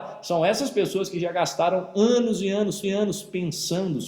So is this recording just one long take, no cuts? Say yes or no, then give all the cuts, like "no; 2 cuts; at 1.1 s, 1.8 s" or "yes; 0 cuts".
no; 1 cut; at 2.8 s